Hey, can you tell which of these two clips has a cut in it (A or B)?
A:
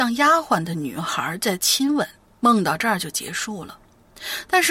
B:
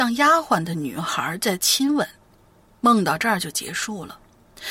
A